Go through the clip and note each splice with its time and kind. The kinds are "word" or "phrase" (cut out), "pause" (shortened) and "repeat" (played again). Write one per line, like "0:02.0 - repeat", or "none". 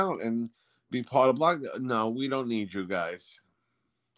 none